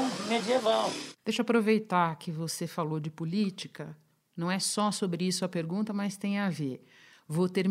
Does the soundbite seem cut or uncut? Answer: uncut